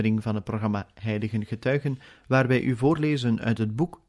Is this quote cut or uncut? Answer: uncut